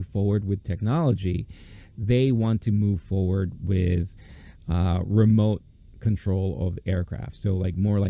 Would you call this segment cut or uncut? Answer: uncut